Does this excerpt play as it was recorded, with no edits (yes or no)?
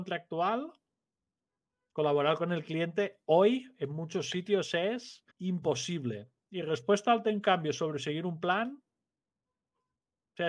no